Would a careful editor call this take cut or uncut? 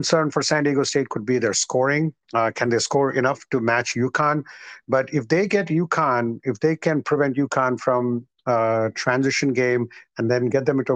uncut